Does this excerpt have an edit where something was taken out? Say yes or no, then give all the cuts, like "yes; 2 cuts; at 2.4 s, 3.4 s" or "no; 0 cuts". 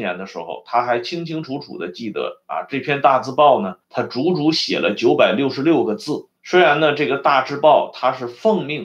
yes; 2 cuts; at 3.8 s, 6.4 s